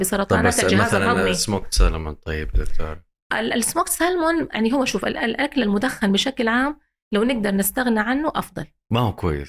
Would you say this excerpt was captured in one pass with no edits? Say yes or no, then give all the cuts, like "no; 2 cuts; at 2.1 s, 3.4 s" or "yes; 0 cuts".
yes; 0 cuts